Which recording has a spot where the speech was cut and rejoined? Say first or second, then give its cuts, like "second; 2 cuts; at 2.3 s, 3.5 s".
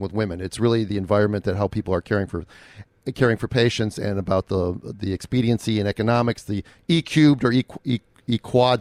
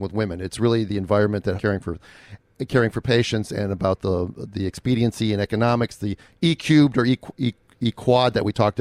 second; 1 cut; at 1.6 s